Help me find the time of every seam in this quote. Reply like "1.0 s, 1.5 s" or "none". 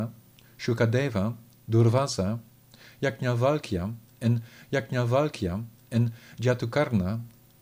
4.6 s